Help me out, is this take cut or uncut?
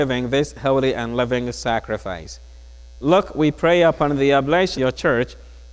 cut